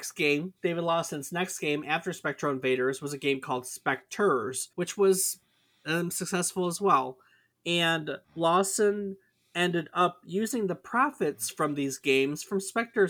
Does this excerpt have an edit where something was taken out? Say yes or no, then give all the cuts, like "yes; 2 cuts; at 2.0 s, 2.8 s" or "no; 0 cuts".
yes; 2 cuts; at 4.7 s, 8.2 s